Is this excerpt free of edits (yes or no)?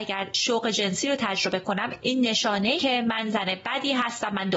no